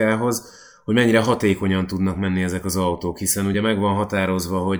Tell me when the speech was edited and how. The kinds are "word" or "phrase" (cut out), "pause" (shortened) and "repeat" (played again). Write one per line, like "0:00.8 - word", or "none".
none